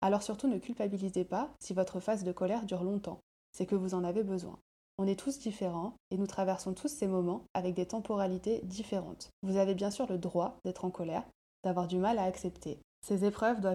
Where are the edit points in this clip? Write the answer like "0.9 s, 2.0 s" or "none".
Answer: 9.3 s